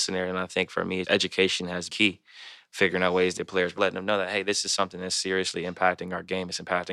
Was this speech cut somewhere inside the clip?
yes; 4 cuts; at 1.0 s, 1.9 s, 3.4 s, 3.8 s

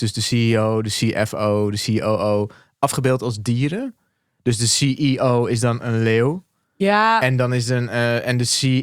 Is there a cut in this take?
no; 0 cuts

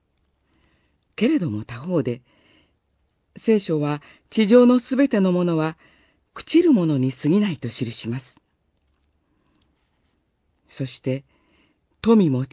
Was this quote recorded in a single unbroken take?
yes; 0 cuts

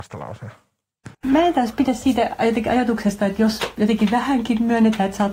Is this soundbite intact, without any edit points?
no; 1 cut; at 1.1 s

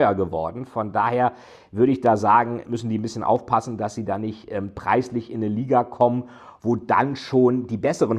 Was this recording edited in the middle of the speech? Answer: no; 0 cuts

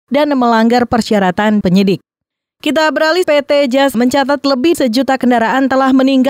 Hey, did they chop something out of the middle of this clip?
yes; 4 cuts; at 1.6 s, 3.2 s, 3.9 s, 4.7 s

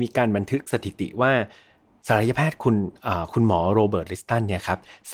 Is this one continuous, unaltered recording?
yes; 0 cuts

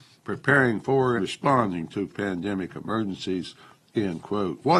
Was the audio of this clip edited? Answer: yes; 2 cuts; at 1.2 s, 2.1 s

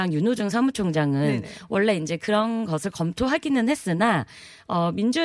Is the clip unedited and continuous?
yes; 0 cuts

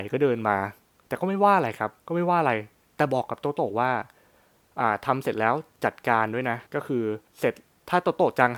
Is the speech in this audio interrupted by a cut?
yes; 3 cuts; at 2.0 s, 6.7 s, 7.3 s

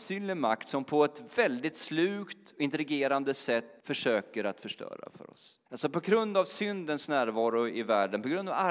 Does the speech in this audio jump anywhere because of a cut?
yes; 2 cuts; at 3.8 s, 5.7 s

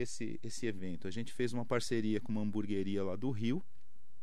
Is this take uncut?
yes; 0 cuts

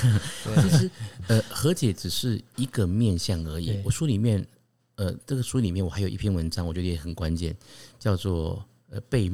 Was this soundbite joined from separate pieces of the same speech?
no; 0 cuts

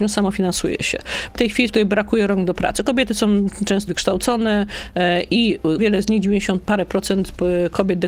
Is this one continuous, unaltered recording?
no; 4 cuts; at 1.4 s, 1.7 s, 3.9 s, 5.8 s

